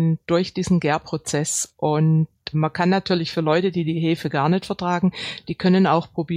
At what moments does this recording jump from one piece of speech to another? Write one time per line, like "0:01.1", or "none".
0:02.5